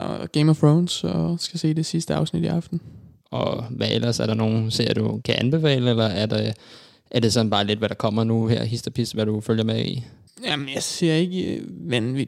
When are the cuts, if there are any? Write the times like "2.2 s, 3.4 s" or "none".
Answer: 5.2 s